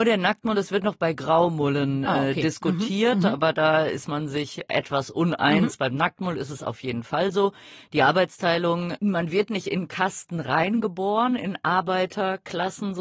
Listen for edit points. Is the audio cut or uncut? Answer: uncut